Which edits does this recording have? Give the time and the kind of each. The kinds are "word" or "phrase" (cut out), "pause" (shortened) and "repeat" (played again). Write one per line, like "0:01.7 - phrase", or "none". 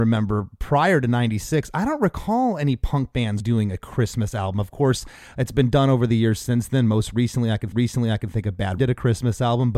0:03.4 - word
0:07.7 - repeat
0:08.8 - word